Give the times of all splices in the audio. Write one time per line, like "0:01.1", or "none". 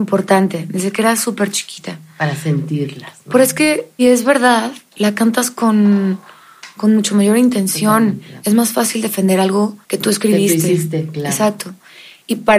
0:04.0
0:04.8
0:09.8